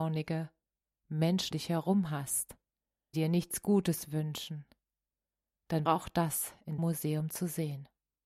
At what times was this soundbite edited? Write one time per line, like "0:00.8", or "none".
0:01.5
0:03.1
0:05.9
0:06.8